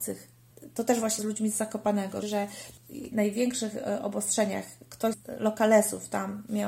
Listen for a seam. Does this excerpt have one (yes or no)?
yes